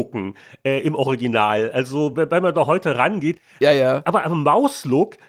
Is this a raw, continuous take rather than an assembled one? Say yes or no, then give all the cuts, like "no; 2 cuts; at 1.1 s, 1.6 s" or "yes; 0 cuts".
yes; 0 cuts